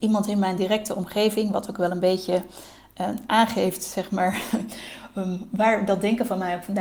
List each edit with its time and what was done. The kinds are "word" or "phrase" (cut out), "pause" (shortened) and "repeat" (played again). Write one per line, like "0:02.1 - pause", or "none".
none